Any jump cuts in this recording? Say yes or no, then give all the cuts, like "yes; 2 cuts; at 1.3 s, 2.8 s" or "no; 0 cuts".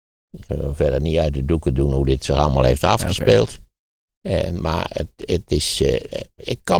no; 0 cuts